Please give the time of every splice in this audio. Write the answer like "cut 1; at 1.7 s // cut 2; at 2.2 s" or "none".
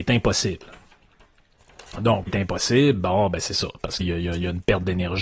cut 1; at 2.3 s // cut 2; at 4.0 s